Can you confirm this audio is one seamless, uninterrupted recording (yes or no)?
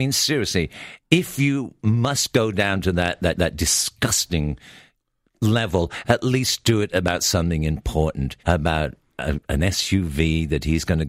no